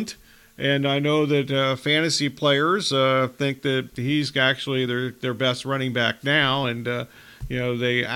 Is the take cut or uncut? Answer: uncut